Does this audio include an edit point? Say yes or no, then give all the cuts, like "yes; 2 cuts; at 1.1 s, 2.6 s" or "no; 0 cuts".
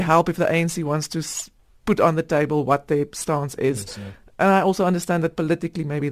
no; 0 cuts